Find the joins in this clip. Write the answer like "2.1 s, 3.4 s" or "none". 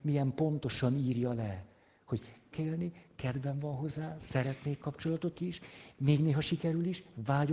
2.5 s, 5.3 s